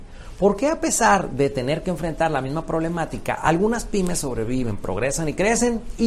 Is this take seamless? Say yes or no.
yes